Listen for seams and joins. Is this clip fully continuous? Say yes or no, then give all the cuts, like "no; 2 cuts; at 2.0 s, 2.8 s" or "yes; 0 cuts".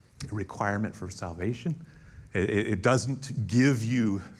yes; 0 cuts